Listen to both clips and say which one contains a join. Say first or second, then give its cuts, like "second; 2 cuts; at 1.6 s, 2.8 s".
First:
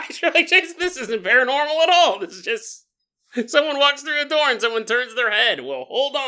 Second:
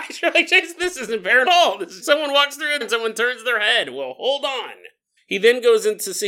second; 4 cuts; at 1.5 s, 2.0 s, 2.8 s, 5.2 s